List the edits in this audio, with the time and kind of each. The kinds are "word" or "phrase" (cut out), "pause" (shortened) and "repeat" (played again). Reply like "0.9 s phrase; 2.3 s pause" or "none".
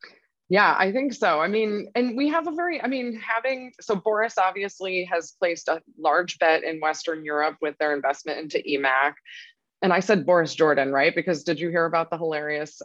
none